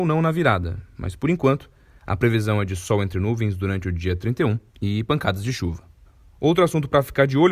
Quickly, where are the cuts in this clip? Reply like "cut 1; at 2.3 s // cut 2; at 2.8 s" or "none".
cut 1; at 4.7 s